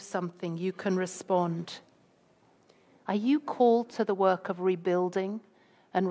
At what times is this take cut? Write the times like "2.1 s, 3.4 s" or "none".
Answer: none